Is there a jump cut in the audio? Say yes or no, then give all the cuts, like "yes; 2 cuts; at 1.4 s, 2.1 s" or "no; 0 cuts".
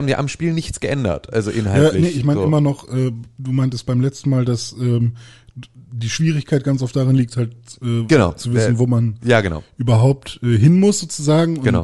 no; 0 cuts